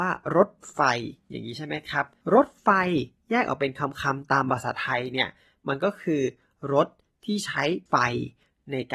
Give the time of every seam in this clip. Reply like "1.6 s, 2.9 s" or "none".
7.9 s